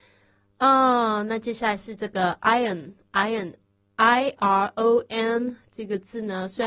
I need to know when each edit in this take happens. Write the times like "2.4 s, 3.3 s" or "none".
none